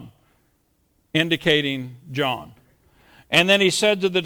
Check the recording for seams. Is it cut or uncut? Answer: uncut